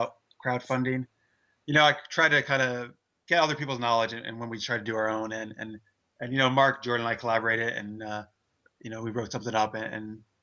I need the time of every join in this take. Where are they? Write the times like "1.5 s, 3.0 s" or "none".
none